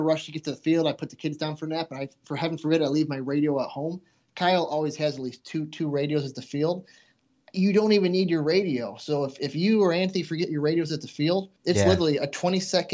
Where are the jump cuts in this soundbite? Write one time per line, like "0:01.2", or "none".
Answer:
0:11.6